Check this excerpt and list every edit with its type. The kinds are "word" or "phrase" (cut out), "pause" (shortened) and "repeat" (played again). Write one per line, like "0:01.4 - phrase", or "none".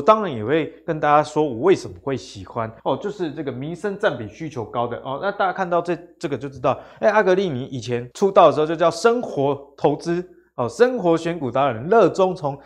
0:02.8 - pause
0:08.1 - pause